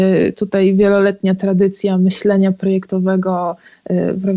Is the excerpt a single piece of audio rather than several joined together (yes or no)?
yes